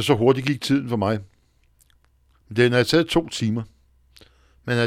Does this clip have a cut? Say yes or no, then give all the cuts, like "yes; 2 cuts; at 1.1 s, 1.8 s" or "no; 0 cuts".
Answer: no; 0 cuts